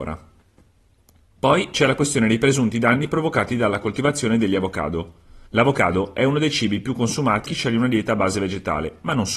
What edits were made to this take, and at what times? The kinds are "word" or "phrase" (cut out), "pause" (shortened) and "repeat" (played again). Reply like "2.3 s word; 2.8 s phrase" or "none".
5.5 s pause; 7.5 s word